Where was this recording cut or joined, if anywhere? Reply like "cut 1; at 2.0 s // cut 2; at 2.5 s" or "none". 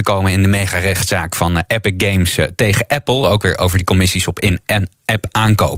none